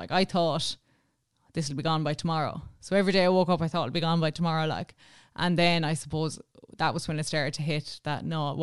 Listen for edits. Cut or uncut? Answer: uncut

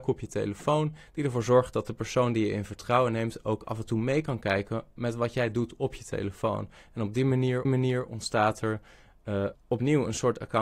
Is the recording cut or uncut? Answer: cut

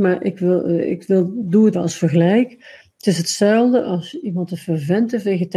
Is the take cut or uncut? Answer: cut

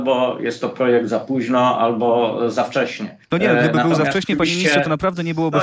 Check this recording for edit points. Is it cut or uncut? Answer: cut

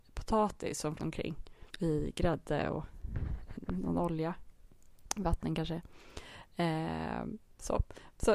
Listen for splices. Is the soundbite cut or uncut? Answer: cut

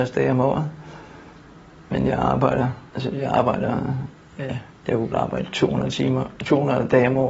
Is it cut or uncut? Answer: cut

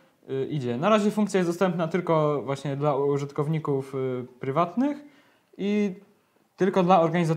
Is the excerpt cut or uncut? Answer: uncut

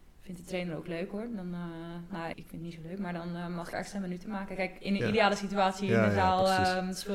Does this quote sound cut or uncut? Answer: cut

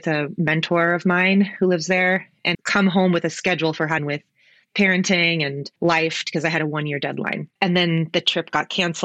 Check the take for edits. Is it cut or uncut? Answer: cut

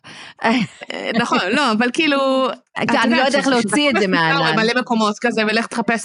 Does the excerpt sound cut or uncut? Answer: cut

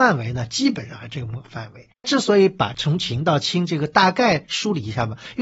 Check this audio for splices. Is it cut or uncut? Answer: cut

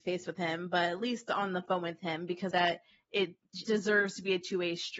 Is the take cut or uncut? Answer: cut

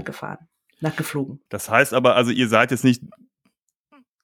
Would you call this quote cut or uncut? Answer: cut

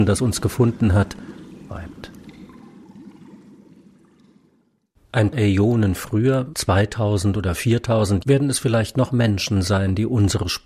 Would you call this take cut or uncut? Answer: cut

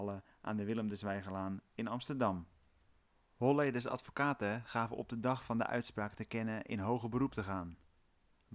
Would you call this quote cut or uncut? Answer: uncut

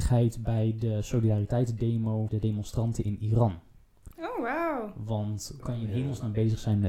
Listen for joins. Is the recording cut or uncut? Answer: cut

